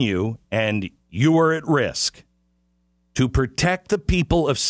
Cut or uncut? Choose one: uncut